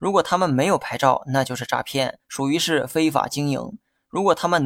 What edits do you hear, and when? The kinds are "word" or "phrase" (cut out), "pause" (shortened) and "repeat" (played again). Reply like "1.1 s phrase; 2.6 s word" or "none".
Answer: 2.2 s pause

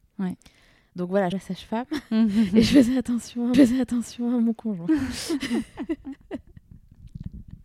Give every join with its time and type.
1.3 s phrase; 3.5 s repeat

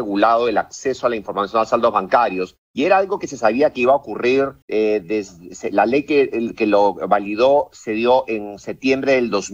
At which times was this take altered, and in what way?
2.6 s pause; 4.6 s pause

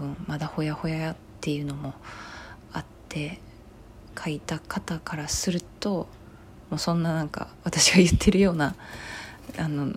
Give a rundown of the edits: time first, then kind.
none

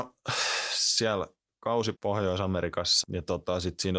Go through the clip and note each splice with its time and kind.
1.9 s word; 3.0 s word

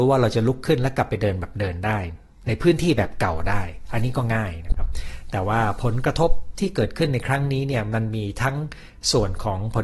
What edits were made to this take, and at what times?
2.3 s pause

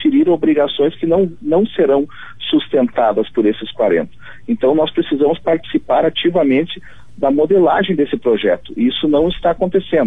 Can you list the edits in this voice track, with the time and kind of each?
none

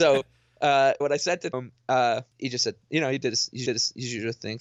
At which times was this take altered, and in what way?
1.0 s word; 1.5 s word; 2.3 s pause; 3.7 s repeat

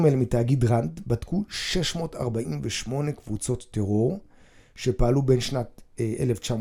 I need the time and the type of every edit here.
none

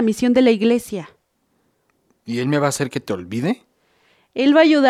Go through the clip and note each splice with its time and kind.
none

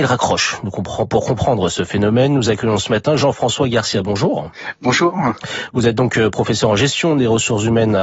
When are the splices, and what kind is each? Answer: none

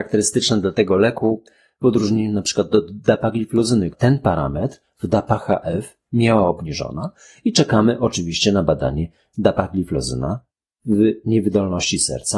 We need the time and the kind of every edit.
3.9 s word

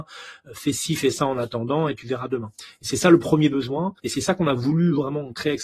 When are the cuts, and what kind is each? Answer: 4.0 s pause

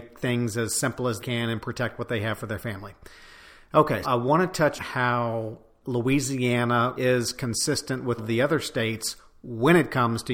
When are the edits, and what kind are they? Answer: 1.2 s word; 4.0 s word; 4.8 s word; 5.8 s word; 7.0 s word; 8.2 s word

